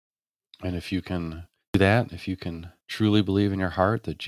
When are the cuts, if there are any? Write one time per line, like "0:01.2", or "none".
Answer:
0:01.6
0:02.8